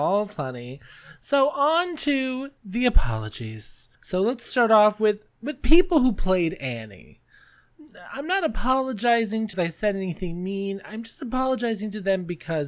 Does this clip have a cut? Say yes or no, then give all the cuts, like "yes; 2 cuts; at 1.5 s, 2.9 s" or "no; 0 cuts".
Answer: yes; 3 cuts; at 2.6 s, 3.9 s, 9.5 s